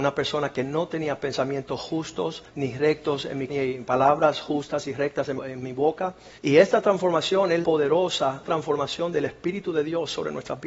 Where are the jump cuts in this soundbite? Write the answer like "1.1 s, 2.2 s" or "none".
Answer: 2.5 s, 3.5 s, 5.4 s, 6.4 s, 7.6 s, 8.4 s